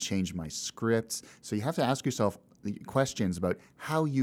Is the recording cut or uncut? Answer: uncut